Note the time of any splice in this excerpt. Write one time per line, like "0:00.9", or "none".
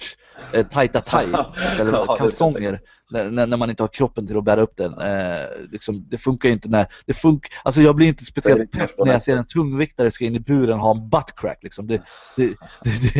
none